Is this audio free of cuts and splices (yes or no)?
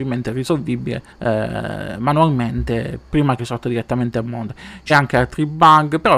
no